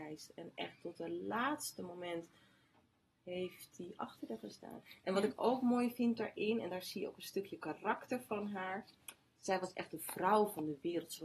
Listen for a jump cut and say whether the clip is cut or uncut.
uncut